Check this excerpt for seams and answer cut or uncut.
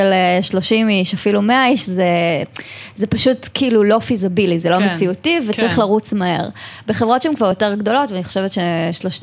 uncut